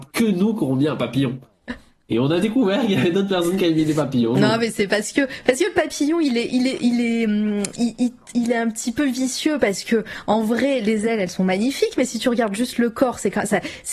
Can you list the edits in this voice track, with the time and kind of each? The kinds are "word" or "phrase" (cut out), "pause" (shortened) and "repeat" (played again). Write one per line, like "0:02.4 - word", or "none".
0:08.3 - word